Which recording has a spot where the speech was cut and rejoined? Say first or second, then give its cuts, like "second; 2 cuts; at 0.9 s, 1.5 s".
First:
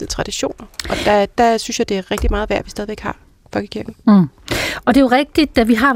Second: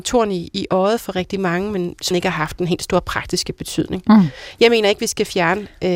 second; 2 cuts; at 1.1 s, 2.1 s